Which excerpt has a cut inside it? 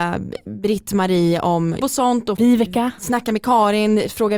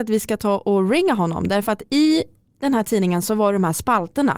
first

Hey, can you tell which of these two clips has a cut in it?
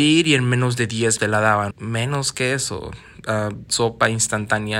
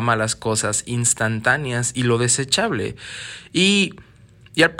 first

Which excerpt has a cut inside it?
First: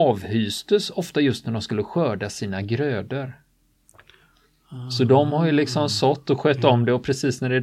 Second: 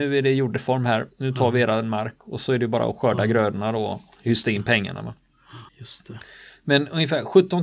second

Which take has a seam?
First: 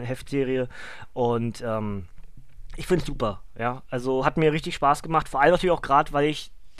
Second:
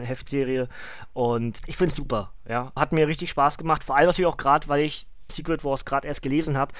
second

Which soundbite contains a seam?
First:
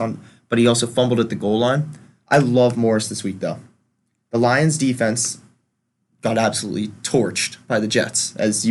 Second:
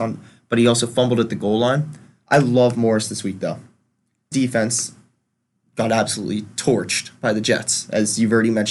second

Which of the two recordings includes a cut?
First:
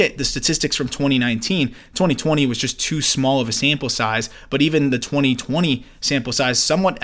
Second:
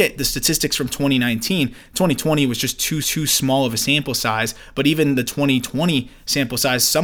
second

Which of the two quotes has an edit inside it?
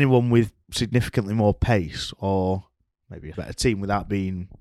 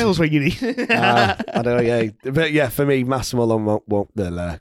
first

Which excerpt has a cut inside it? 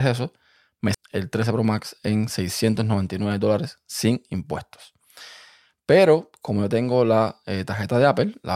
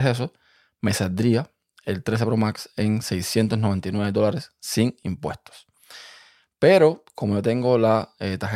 first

